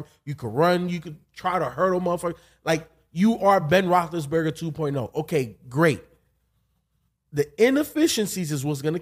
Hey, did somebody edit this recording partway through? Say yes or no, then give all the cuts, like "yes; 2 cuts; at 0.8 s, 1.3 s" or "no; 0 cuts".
no; 0 cuts